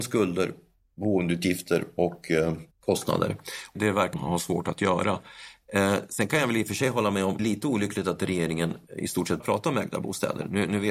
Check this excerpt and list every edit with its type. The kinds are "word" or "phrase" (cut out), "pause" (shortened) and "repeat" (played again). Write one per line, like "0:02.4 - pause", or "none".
0:02.0 - word
0:02.7 - pause
0:03.7 - word
0:04.1 - word
0:07.4 - phrase
0:08.9 - pause
0:09.4 - word